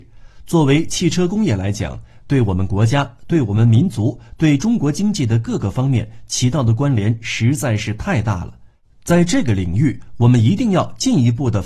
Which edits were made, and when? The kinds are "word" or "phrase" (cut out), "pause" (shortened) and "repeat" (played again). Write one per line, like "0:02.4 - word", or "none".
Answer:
none